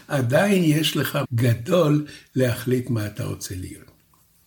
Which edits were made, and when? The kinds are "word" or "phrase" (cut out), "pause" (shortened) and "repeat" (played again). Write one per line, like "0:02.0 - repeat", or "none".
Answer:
0:01.2 - word